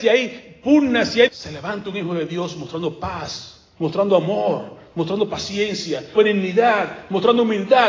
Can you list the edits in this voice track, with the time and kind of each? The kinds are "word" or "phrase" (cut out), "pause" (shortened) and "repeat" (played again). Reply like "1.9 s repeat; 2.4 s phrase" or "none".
1.3 s word; 3.7 s pause; 6.2 s word